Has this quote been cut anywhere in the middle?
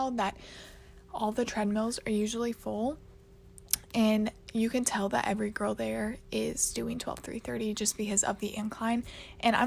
no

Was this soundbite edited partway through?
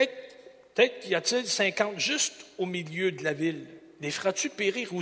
no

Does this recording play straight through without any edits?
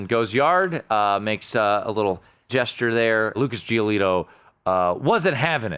no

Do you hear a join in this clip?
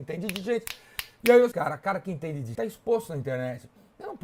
yes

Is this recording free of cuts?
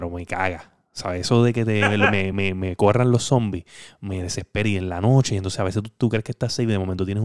yes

